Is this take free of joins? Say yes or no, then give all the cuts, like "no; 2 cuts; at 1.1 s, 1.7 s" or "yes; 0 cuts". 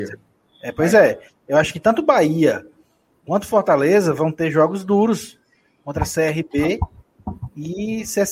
yes; 0 cuts